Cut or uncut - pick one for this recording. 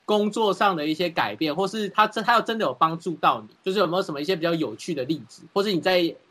cut